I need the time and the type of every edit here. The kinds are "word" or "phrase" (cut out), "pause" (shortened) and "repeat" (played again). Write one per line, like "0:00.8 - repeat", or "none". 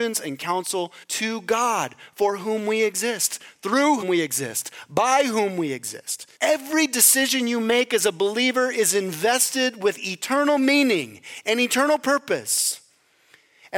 0:01.0 - pause
0:04.0 - word
0:06.4 - pause